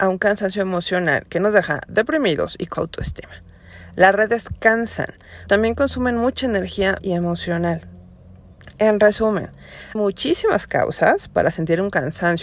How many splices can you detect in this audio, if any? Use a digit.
4